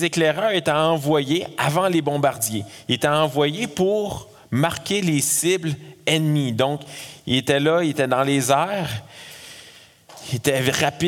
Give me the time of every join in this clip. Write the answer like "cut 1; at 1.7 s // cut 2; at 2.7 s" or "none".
none